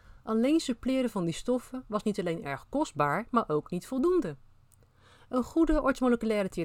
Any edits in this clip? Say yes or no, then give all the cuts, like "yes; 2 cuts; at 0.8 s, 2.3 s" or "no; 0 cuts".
no; 0 cuts